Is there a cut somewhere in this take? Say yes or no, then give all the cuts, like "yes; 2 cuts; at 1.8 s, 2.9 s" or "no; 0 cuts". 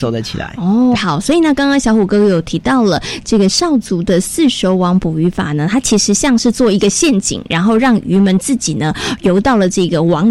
yes; 1 cut; at 1.0 s